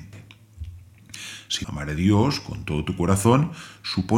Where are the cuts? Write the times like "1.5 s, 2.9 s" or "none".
1.6 s

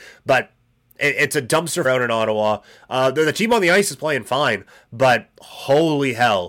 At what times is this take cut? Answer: 1.8 s

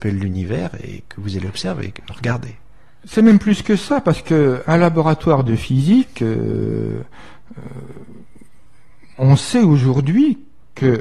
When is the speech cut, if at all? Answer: 9.1 s

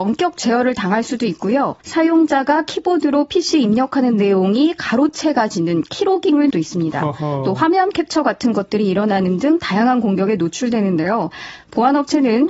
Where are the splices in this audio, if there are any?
1.8 s, 6.5 s

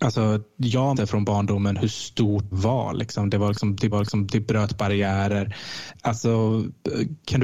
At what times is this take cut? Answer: 0.9 s, 2.5 s, 3.9 s

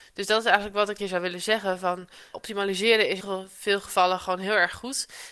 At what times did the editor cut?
1.0 s, 2.3 s, 3.2 s

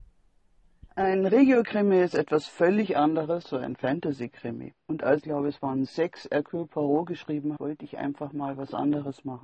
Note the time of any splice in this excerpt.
3.4 s, 4.8 s, 5.2 s, 5.9 s, 7.6 s

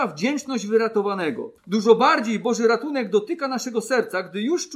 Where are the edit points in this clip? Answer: 1.6 s

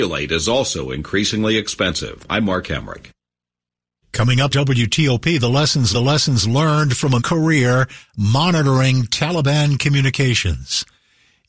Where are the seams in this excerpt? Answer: 4.5 s, 5.9 s, 7.2 s

